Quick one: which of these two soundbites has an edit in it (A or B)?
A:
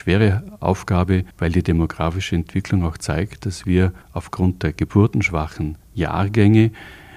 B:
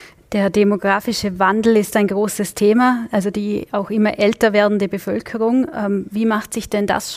A